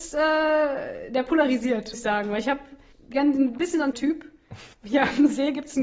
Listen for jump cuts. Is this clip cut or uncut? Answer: cut